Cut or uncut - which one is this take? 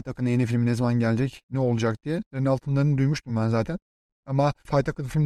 uncut